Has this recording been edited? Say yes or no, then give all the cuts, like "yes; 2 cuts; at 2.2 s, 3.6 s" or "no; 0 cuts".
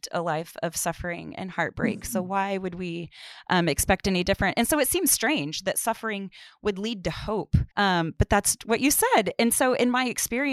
yes; 2 cuts; at 7.7 s, 8.6 s